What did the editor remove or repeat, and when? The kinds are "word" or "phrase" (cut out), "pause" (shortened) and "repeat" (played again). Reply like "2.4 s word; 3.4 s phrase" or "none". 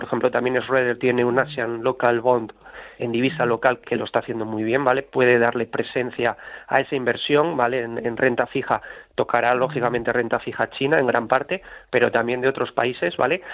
3.0 s word